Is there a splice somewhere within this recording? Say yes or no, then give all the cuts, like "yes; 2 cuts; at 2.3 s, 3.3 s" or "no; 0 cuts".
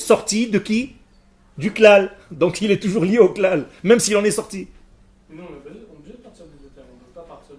no; 0 cuts